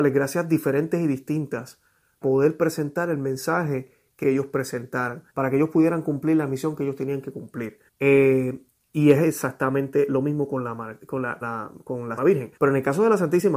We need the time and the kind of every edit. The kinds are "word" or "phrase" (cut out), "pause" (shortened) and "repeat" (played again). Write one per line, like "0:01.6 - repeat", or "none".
0:02.2 - word
0:04.2 - phrase
0:05.3 - pause
0:07.9 - pause
0:11.4 - word
0:12.2 - word
0:12.6 - pause